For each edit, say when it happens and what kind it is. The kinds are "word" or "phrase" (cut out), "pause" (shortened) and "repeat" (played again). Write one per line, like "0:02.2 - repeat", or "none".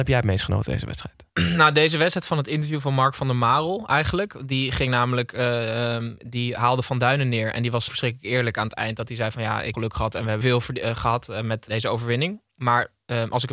0:01.3 - pause
0:06.2 - pause
0:07.9 - word
0:09.7 - phrase
0:10.4 - phrase
0:11.7 - word